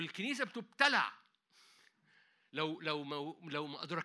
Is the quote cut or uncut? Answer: uncut